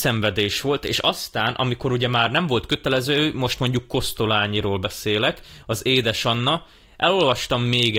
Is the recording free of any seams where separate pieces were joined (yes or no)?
yes